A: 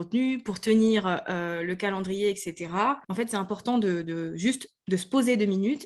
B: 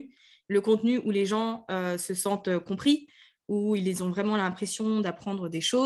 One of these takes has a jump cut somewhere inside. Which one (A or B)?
A